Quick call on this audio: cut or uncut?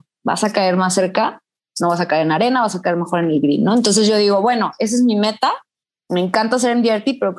uncut